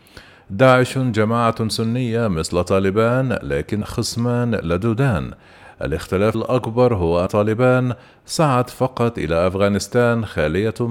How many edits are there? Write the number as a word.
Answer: three